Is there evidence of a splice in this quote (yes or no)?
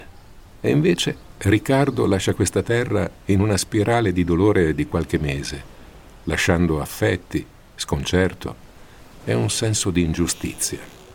yes